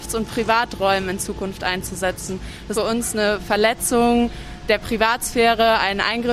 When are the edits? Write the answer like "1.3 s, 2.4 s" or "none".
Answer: 2.7 s